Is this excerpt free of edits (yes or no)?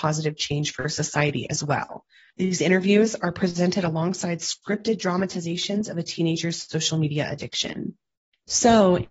yes